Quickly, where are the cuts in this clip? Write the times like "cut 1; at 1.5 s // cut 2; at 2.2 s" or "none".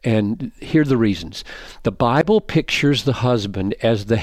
none